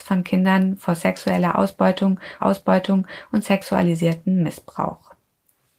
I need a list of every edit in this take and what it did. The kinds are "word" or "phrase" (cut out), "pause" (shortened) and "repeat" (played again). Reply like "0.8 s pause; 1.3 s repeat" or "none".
2.4 s repeat

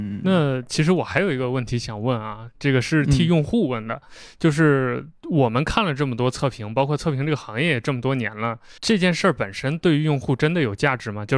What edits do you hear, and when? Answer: 8.8 s pause

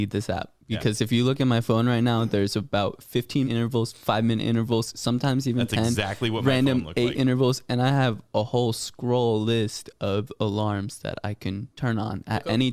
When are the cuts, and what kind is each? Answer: 3.4 s word; 11.7 s pause

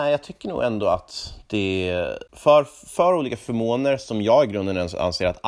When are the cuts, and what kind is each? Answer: 2.3 s pause

